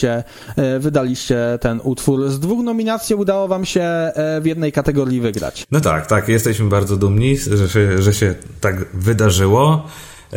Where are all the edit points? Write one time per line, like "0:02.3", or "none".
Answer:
none